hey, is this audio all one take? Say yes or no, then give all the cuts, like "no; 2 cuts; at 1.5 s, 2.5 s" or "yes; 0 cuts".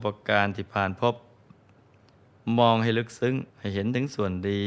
no; 1 cut; at 3.5 s